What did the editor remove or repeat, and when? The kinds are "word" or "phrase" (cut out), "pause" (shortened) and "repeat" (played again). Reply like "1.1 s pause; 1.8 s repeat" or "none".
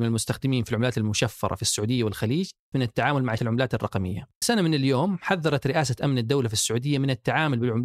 2.7 s phrase; 3.4 s word; 4.4 s word